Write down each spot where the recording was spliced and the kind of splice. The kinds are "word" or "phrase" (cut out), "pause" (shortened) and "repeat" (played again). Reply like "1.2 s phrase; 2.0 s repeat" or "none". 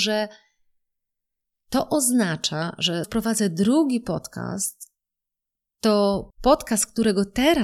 3.0 s word; 6.3 s pause